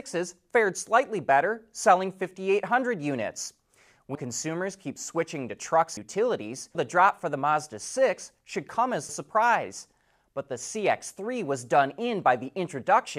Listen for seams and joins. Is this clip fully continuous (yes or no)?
no